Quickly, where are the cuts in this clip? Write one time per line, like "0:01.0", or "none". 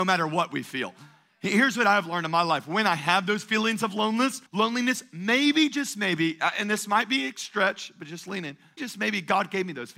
0:04.5
0:08.8